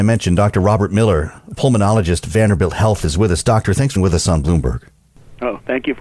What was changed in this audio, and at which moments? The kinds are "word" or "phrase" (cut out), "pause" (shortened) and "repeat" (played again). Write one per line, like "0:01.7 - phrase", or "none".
0:04.0 - word